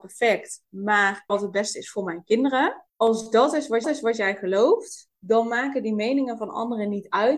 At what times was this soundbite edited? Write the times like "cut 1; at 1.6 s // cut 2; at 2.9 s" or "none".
cut 1; at 1.3 s // cut 2; at 2.9 s // cut 3; at 3.8 s // cut 4; at 5.1 s

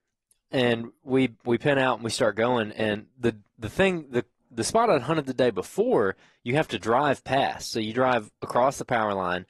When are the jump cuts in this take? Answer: none

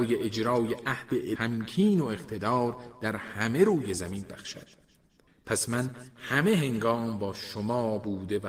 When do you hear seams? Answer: cut 1; at 1.3 s

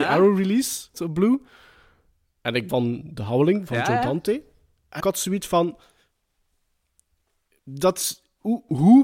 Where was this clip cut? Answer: cut 1; at 0.9 s // cut 2; at 2.7 s // cut 3; at 3.7 s // cut 4; at 5.0 s

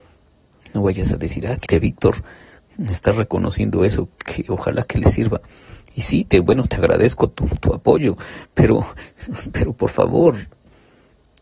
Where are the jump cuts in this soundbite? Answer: cut 1; at 1.7 s

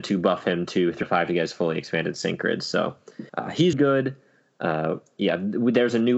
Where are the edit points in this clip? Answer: cut 1; at 1.0 s // cut 2; at 3.3 s // cut 3; at 3.7 s

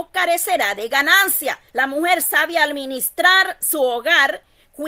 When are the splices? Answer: cut 1; at 1.7 s // cut 2; at 2.2 s

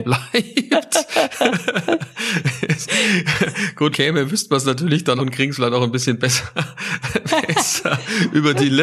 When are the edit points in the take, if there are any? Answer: cut 1; at 3.9 s // cut 2; at 5.2 s

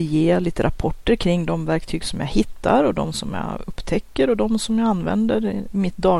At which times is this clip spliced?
none

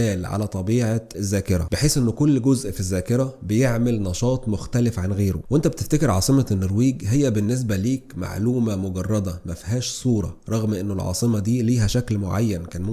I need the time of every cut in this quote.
cut 1; at 1.1 s

